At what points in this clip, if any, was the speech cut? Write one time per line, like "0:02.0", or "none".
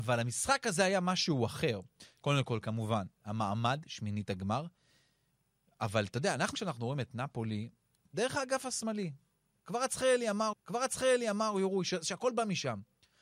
0:06.5
0:10.5